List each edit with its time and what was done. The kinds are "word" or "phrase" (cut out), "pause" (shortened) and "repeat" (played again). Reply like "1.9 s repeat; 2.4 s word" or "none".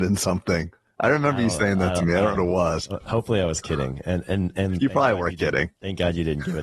2.3 s word